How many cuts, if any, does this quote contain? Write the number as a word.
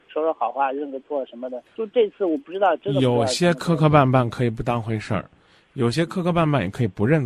one